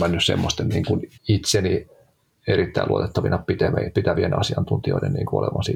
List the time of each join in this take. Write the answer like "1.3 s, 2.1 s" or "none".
1.2 s